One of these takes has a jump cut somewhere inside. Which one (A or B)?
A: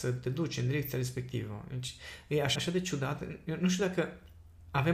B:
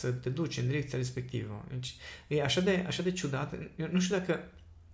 A